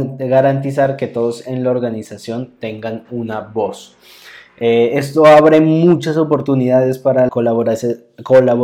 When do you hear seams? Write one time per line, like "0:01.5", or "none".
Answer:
0:07.3